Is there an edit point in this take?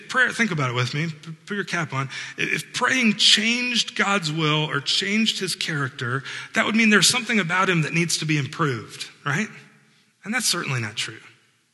no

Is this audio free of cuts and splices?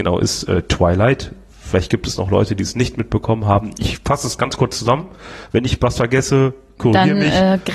yes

